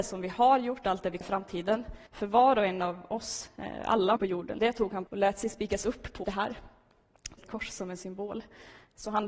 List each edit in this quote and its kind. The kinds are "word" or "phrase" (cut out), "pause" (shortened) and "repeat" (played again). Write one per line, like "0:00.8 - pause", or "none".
0:01.2 - phrase
0:02.1 - pause
0:04.2 - word
0:04.6 - word
0:05.1 - word
0:06.2 - phrase
0:07.4 - phrase